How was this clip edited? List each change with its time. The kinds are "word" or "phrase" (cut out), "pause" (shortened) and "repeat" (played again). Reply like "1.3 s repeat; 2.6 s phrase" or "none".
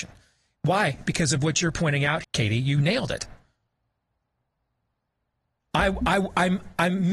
2.2 s word